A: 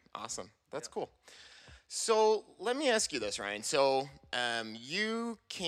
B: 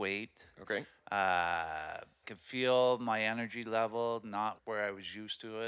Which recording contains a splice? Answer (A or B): B